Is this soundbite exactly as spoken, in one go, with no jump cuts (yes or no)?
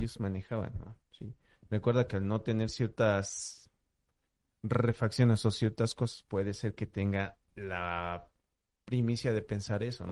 no